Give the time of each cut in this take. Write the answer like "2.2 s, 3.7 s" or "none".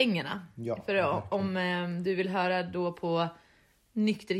none